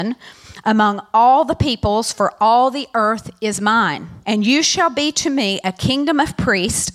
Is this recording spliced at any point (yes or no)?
yes